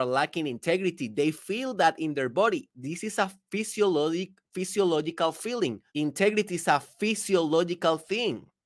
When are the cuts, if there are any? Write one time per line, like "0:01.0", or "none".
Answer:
0:05.9